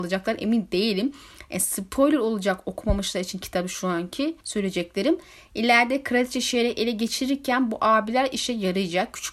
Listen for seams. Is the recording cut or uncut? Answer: cut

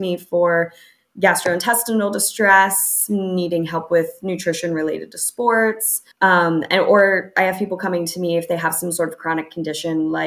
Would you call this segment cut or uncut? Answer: cut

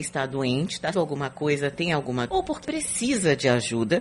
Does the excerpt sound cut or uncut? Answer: cut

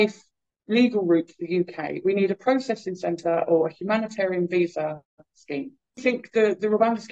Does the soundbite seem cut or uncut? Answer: cut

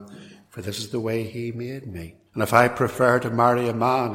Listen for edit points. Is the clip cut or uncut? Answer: cut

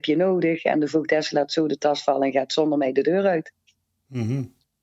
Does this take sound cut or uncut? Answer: uncut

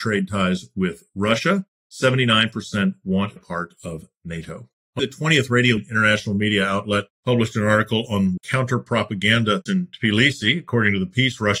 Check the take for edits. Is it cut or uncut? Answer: cut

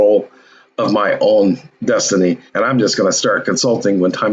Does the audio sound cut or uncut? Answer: cut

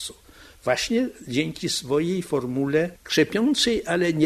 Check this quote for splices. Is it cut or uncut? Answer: uncut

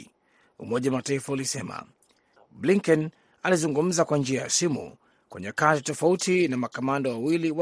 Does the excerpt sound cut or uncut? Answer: uncut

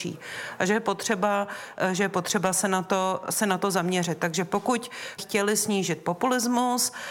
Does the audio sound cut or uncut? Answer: cut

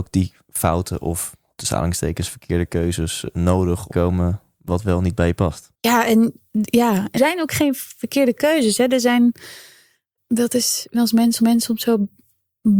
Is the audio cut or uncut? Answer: cut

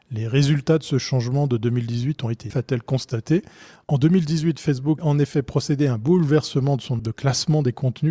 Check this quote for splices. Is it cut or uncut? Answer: cut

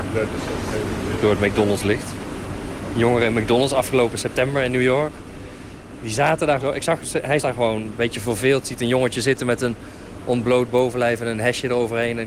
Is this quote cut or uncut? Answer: cut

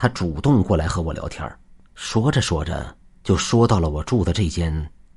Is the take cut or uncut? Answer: uncut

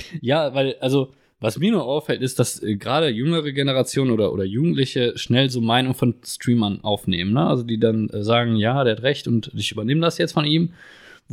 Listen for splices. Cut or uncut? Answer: uncut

